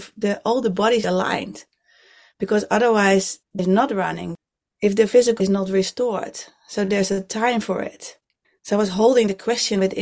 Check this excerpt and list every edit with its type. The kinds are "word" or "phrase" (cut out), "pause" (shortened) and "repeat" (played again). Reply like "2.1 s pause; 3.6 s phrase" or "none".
1.0 s phrase; 3.6 s word; 5.4 s word; 8.4 s pause